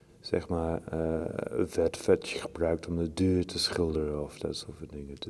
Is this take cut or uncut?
uncut